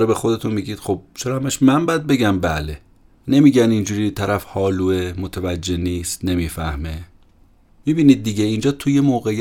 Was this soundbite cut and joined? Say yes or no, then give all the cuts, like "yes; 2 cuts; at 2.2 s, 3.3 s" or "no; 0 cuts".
no; 0 cuts